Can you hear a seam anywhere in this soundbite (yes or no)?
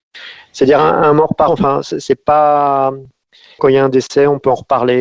yes